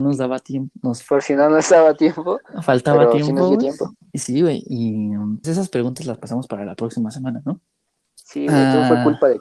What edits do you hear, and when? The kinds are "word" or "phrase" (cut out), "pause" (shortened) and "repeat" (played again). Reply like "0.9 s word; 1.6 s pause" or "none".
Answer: 5.4 s word